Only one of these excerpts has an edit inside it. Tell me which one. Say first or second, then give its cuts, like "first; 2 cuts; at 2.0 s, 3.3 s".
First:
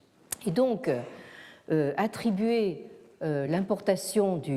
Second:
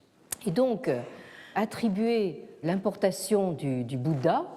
second; 2 cuts; at 1.5 s, 2.6 s